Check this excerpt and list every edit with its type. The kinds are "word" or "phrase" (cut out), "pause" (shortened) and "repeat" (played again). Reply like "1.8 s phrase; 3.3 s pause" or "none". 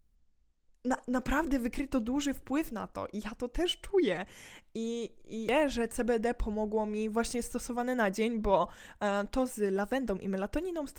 none